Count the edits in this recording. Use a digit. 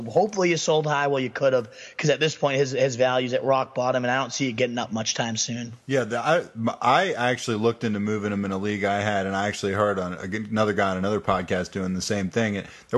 1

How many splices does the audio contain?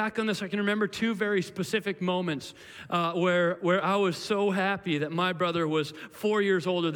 0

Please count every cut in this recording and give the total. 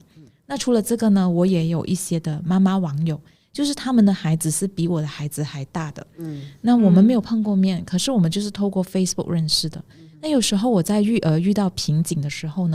0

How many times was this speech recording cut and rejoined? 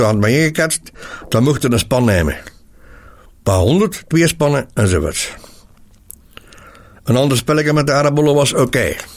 0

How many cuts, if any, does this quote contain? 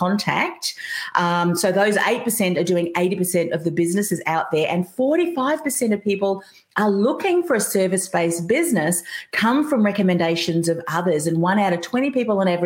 0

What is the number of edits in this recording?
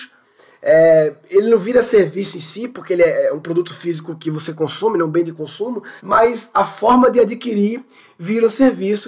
1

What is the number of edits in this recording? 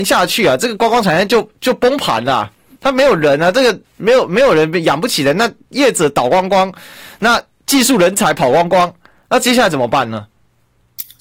1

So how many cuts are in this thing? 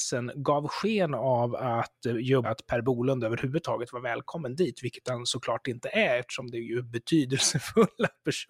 1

